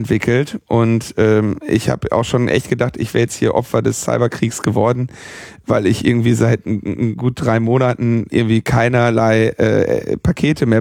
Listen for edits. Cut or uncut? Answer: cut